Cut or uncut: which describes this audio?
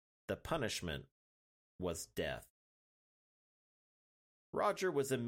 uncut